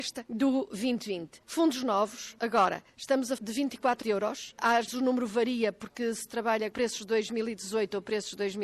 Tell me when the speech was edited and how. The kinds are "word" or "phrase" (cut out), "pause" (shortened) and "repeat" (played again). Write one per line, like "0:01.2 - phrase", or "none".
0:03.4 - word
0:04.0 - phrase
0:04.9 - word
0:06.7 - word